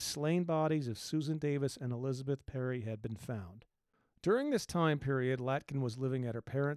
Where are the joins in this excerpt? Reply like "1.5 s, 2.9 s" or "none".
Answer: none